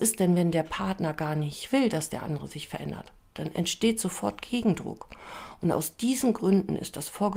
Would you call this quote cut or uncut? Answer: uncut